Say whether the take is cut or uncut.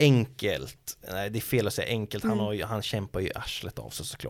uncut